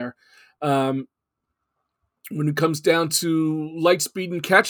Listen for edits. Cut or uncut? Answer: uncut